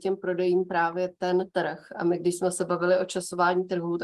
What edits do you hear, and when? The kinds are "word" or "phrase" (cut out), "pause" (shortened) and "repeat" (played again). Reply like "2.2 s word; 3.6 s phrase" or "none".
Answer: 1.5 s pause